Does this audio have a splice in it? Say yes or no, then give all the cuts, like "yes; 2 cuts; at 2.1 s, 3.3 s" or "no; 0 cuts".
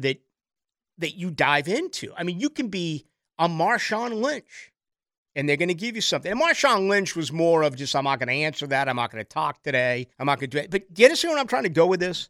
yes; 1 cut; at 10.1 s